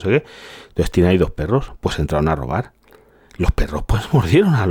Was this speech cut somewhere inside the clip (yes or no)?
no